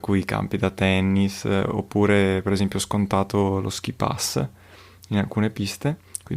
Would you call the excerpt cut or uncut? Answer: uncut